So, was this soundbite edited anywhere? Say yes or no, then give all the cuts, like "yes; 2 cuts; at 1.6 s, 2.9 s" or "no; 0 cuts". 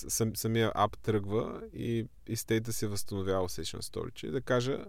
no; 0 cuts